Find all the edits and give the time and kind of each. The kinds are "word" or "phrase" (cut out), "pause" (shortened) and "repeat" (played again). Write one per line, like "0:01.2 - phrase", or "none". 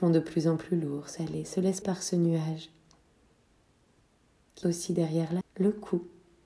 0:01.2 - word
0:01.8 - word
0:04.6 - word
0:05.4 - word